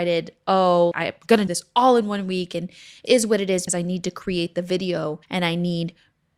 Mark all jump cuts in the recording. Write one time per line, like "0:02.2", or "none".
0:00.9
0:01.5
0:03.1
0:03.7
0:05.2